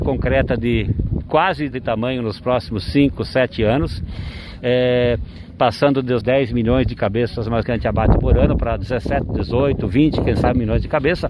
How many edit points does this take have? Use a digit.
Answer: 3